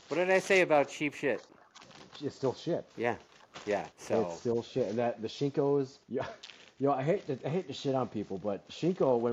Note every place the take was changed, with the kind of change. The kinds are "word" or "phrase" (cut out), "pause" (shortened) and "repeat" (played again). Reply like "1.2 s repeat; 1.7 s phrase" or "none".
2.9 s pause; 3.9 s pause; 6.0 s pause